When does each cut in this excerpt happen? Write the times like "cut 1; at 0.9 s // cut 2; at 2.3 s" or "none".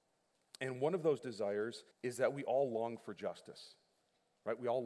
cut 1; at 1.9 s